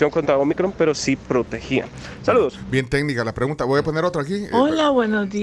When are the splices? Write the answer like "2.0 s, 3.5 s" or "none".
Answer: none